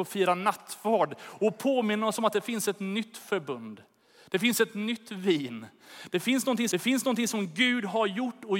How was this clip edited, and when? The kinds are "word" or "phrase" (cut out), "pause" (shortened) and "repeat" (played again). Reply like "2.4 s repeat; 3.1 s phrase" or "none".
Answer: 6.7 s repeat